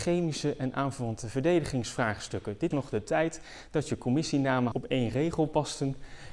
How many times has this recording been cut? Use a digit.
2